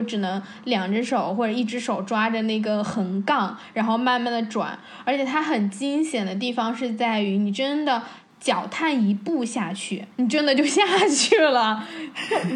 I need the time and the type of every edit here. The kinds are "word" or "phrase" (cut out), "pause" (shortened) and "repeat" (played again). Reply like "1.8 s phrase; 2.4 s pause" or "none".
10.1 s pause